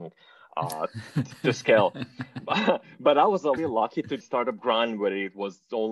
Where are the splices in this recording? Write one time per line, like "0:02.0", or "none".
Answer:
0:03.6
0:04.2